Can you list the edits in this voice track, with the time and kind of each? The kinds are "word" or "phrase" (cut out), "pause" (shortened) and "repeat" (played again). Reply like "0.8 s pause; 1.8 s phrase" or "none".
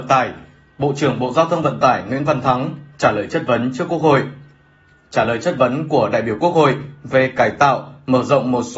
none